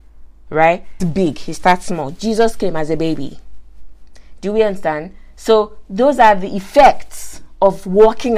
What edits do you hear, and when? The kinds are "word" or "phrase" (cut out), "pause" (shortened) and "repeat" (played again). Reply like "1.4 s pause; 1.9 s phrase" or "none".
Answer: 1.0 s word